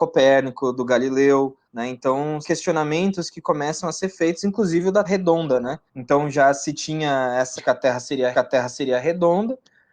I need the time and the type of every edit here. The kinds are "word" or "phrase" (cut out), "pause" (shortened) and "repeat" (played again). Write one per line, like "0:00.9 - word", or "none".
0:01.6 - pause
0:02.4 - word
0:05.0 - word
0:05.9 - pause
0:07.6 - word
0:08.3 - repeat